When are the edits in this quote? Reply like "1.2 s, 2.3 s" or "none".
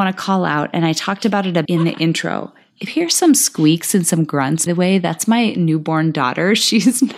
1.6 s, 2.9 s, 4.7 s